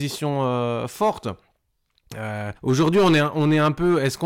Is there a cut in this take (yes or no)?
yes